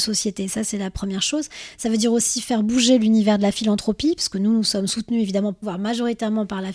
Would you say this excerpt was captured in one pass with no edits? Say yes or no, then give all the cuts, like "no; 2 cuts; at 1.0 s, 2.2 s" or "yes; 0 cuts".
no; 1 cut; at 5.6 s